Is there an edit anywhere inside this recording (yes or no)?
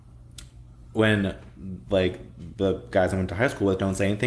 no